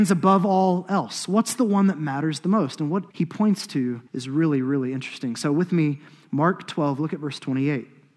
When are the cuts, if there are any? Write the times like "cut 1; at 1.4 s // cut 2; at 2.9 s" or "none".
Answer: cut 1; at 3.1 s // cut 2; at 4.1 s